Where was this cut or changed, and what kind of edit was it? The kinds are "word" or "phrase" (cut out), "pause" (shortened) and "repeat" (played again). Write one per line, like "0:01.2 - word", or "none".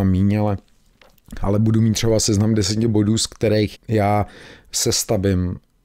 0:03.8 - word